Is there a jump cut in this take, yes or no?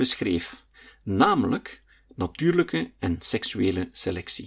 no